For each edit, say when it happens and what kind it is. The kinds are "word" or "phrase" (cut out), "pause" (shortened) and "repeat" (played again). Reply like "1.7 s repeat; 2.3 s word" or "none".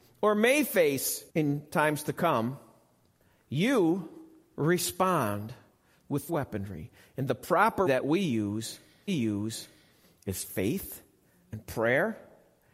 1.3 s pause; 4.5 s word; 6.3 s phrase; 7.9 s word; 9.1 s repeat